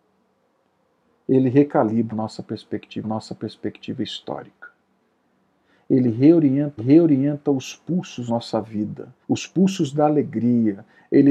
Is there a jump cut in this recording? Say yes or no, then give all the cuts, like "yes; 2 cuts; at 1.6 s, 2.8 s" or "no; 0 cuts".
yes; 5 cuts; at 2.1 s, 3.0 s, 6.8 s, 8.3 s, 9.2 s